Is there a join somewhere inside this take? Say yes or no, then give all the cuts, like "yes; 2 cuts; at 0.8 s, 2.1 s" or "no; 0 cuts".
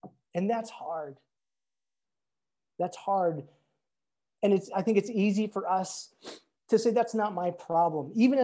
no; 0 cuts